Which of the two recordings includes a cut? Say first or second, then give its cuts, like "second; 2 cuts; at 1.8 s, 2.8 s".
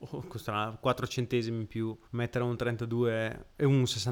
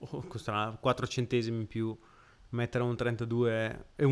first; 1 cut; at 2.0 s